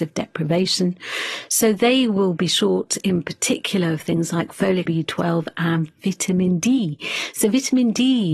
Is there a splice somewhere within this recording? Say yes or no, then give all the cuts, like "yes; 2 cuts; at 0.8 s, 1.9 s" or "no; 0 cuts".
yes; 1 cut; at 4.9 s